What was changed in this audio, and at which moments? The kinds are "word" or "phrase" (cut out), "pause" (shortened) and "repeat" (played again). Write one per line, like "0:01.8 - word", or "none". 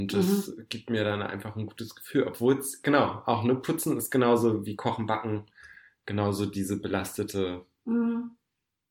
none